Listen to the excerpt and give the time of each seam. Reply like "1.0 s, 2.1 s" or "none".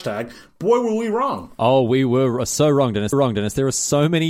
3.1 s